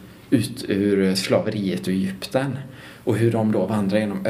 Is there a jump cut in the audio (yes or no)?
no